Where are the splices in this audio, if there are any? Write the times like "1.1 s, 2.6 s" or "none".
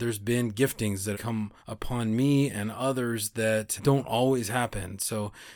1.1 s, 1.6 s, 3.8 s